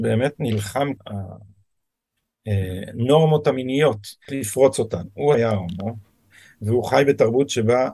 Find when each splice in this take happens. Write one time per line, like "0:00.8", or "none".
0:01.0
0:04.3
0:05.3